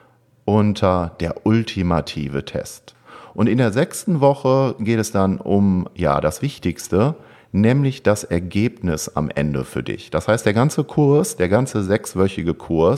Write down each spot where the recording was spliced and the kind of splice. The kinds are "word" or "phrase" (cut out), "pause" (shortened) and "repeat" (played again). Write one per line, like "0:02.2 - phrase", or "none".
none